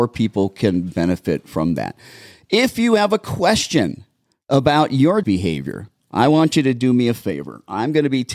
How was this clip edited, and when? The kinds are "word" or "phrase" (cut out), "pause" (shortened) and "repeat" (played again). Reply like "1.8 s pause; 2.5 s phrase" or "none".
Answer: 5.2 s word